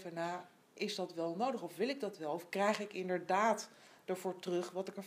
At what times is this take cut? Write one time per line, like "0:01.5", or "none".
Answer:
none

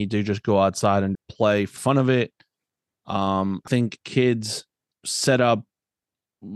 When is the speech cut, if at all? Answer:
0:01.1
0:01.8
0:03.7
0:04.0
0:04.9

